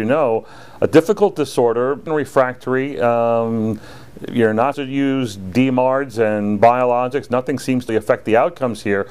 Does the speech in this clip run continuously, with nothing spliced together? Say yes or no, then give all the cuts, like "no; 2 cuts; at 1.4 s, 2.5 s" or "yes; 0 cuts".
no; 3 cuts; at 2.1 s, 4.7 s, 7.9 s